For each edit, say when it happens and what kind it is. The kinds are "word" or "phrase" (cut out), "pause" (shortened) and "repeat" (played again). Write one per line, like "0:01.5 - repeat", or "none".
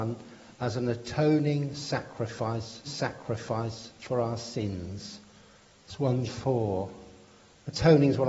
0:02.8 - repeat
0:06.3 - word